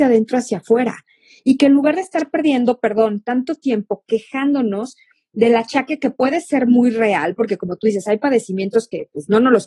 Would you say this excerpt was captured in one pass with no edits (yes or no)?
yes